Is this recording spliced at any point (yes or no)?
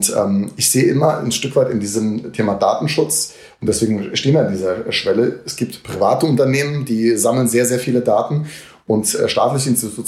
no